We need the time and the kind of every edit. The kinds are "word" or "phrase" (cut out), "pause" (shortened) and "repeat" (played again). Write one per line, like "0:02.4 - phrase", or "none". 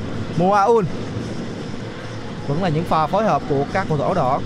none